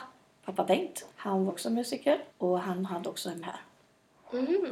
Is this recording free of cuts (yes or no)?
no